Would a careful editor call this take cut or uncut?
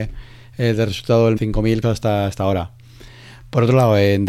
cut